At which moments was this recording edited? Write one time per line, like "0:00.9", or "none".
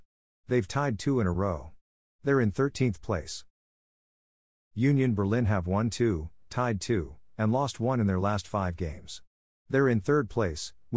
none